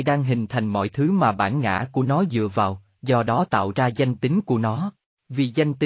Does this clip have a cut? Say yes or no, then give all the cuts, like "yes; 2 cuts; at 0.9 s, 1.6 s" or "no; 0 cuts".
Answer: no; 0 cuts